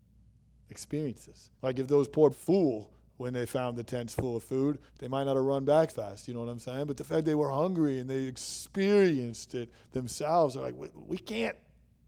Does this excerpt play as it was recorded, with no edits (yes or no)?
no